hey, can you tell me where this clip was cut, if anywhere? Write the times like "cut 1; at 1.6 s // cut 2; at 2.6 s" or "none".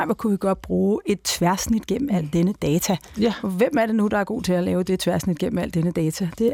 none